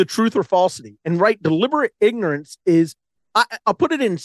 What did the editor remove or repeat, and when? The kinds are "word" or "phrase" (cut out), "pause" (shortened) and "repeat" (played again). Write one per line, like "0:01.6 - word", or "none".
none